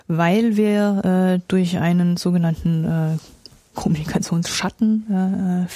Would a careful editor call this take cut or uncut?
uncut